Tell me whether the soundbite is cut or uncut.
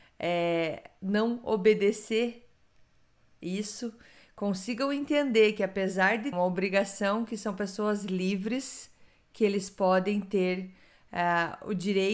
cut